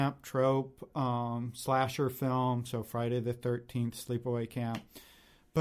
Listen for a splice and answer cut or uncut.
uncut